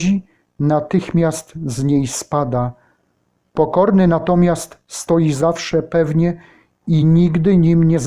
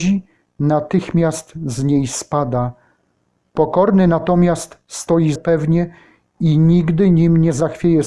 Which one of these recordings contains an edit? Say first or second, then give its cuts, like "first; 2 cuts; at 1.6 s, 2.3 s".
second; 1 cut; at 5.4 s